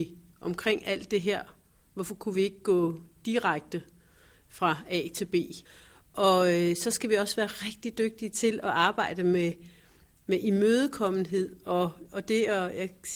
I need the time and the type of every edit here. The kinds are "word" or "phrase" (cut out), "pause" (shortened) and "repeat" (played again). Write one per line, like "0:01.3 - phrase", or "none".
none